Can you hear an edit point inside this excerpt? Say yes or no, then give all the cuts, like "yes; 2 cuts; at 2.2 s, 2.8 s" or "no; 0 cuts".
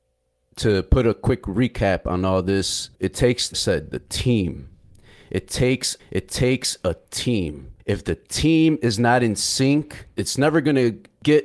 yes; 4 cuts; at 2.9 s, 3.5 s, 6.0 s, 7.8 s